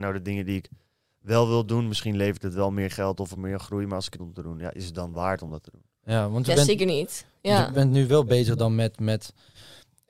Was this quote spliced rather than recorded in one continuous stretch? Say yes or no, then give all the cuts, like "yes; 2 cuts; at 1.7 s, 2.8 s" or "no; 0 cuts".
yes; 1 cut; at 4.2 s